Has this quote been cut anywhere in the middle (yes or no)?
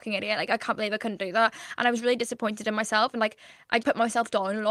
yes